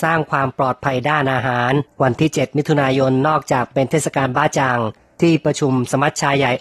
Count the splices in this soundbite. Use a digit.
2